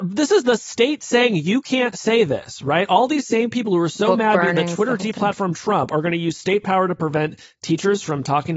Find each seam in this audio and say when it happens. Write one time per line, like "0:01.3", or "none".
none

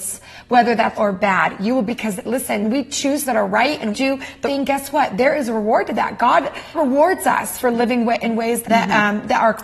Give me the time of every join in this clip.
0:00.9
0:01.9
0:02.6
0:03.2
0:03.9
0:04.4
0:06.7
0:08.6

